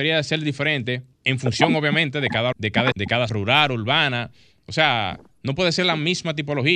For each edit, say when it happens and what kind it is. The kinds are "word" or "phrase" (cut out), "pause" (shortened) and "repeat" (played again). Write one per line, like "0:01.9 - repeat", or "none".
0:01.1 - pause
0:02.5 - word
0:02.9 - word
0:03.3 - word